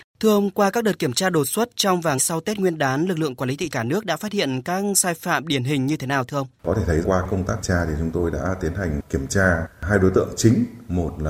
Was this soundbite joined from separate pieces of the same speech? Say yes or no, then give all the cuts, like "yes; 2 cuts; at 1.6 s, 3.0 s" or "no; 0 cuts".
yes; 5 cuts; at 2.2 s, 3.7 s, 6.5 s, 7.0 s, 7.6 s